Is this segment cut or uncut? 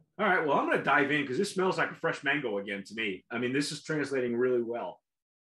uncut